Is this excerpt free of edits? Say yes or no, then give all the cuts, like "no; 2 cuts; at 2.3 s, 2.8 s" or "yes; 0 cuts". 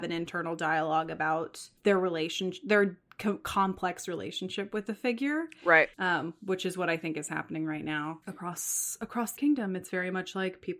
no; 4 cuts; at 1.8 s, 5.9 s, 8.2 s, 9.4 s